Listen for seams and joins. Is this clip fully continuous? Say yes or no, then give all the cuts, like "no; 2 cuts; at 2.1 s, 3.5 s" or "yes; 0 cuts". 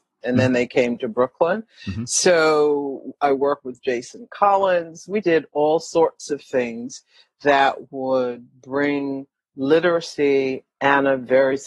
no; 1 cut; at 5.2 s